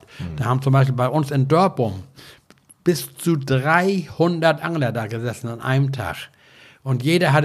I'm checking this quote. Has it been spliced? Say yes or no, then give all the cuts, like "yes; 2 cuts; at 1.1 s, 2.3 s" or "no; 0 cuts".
no; 0 cuts